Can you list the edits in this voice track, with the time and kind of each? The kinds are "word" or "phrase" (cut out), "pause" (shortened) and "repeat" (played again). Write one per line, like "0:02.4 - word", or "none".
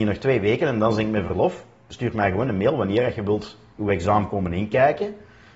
none